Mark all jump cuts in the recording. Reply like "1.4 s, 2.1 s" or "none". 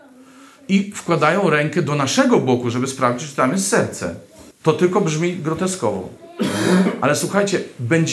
4.5 s